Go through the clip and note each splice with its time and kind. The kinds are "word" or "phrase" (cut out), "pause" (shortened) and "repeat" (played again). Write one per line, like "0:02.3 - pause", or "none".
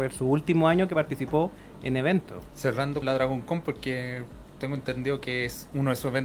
0:03.0 - word